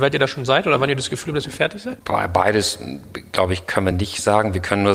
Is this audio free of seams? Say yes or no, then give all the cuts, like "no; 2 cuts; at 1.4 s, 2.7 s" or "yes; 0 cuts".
yes; 0 cuts